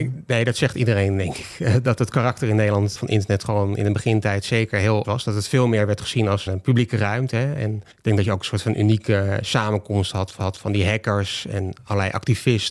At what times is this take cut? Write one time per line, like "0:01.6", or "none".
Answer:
0:03.0
0:05.0
0:06.5
0:07.9
0:10.4

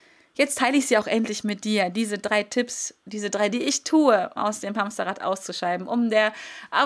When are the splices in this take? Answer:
0:03.0
0:03.5
0:04.4

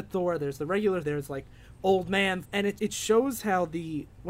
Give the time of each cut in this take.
0:01.0
0:02.4
0:02.8

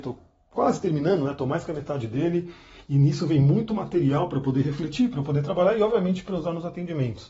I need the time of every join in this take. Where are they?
none

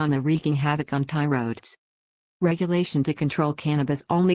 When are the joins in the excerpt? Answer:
none

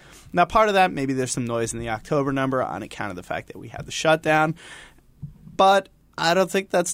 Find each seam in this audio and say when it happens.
none

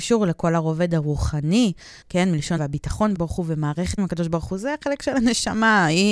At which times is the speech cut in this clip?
0:02.0
0:02.6
0:03.1
0:04.0

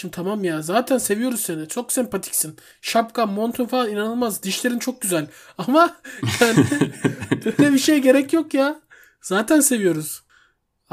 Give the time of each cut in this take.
none

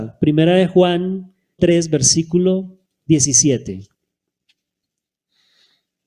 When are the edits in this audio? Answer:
0:01.6

